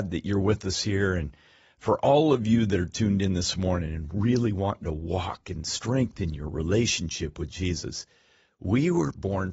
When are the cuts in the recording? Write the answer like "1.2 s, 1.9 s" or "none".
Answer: none